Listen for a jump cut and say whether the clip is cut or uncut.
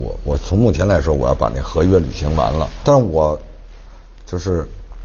cut